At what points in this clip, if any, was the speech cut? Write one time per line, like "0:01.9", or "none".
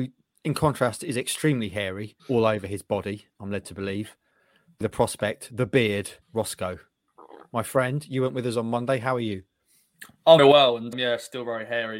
0:02.2
0:03.3
0:04.8
0:06.2
0:10.4
0:10.9